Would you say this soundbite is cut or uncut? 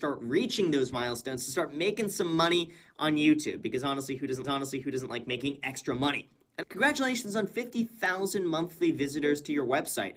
cut